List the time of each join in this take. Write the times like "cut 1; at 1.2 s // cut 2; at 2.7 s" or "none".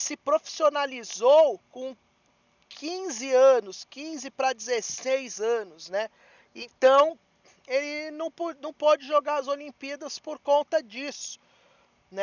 none